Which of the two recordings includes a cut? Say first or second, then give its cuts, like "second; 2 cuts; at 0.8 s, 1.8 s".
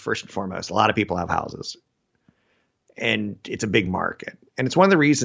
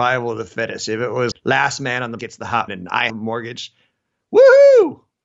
second; 4 cuts; at 1.3 s, 2.2 s, 2.7 s, 3.1 s